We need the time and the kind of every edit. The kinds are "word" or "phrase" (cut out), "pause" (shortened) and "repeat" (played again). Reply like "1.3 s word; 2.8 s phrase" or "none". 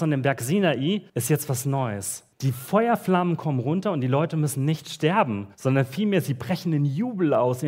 1.1 s pause; 2.3 s pause; 5.5 s pause

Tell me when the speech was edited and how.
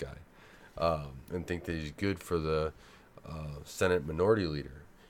none

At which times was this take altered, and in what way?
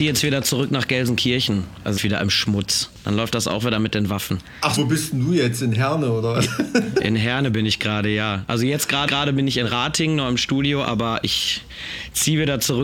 2.0 s phrase; 4.8 s word; 9.1 s repeat

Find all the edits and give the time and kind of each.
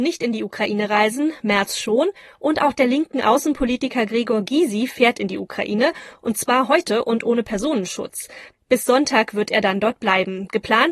none

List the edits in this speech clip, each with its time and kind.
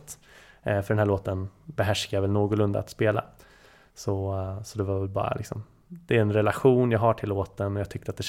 none

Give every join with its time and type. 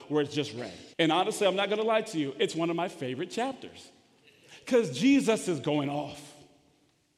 0.9 s pause

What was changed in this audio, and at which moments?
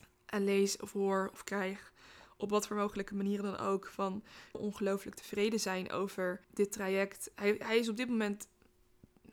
4.5 s phrase; 6.4 s pause

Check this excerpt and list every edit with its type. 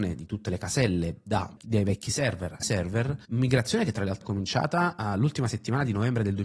2.6 s word; 3.2 s pause; 4.2 s word

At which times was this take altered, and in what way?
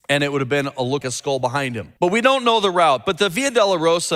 1.0 s word; 2.0 s pause

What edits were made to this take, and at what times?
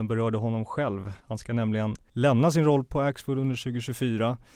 1.2 s pause

